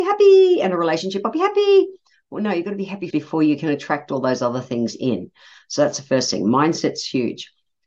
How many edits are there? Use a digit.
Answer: 1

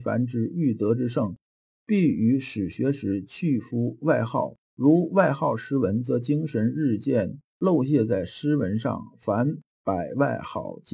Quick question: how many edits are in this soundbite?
1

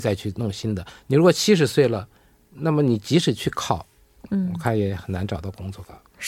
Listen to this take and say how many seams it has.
0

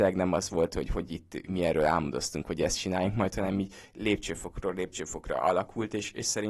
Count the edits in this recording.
0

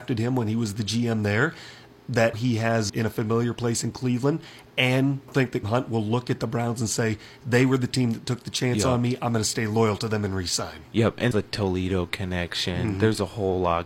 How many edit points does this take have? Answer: 5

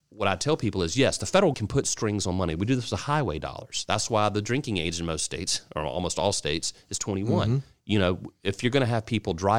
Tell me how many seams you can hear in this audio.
1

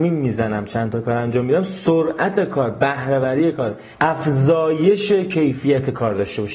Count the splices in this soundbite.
1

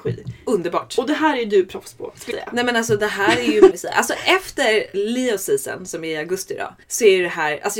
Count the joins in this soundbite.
4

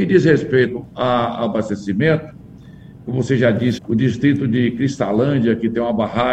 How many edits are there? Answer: 1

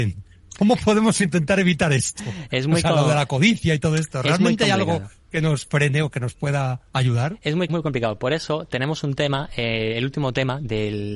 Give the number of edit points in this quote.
1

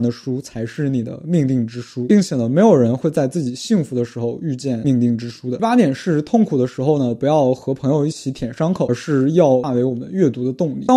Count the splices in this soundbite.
0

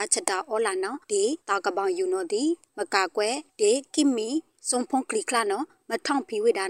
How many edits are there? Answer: 3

